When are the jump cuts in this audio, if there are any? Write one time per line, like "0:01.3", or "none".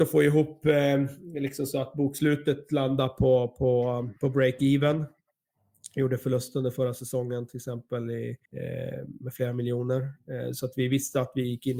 0:04.2
0:08.4